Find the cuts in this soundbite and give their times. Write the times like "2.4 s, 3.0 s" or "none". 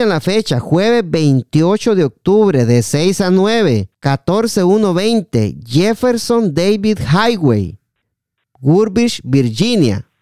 none